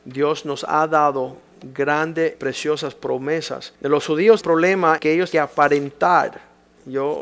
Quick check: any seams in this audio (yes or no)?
yes